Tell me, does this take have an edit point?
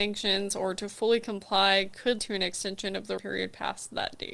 yes; 2 cuts; at 2.2 s, 3.2 s

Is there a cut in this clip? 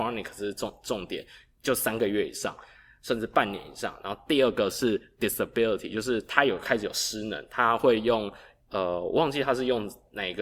no; 0 cuts

